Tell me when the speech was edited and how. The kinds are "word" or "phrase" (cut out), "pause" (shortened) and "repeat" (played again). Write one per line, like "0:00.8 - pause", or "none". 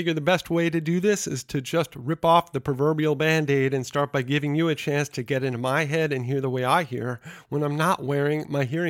none